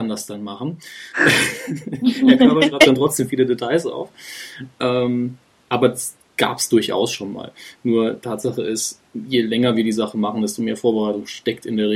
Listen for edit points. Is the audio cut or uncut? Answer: uncut